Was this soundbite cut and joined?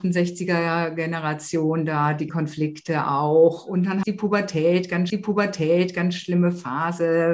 yes; 3 cuts; at 2.3 s, 4.0 s, 5.1 s

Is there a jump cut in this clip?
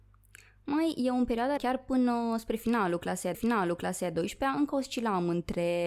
yes; 2 cuts; at 1.6 s, 3.3 s

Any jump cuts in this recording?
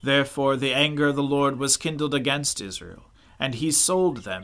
no; 0 cuts

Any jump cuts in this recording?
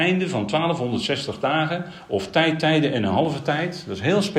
no; 0 cuts

